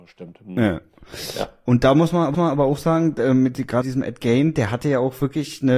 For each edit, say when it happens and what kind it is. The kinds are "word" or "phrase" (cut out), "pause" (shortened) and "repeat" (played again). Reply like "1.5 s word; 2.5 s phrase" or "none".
2.3 s repeat; 3.8 s word